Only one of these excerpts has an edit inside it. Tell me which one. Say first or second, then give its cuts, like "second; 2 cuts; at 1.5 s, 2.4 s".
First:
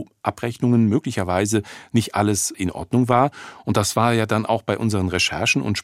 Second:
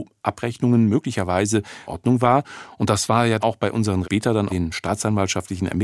second; 4 cuts; at 1.9 s, 3.4 s, 4.0 s, 4.5 s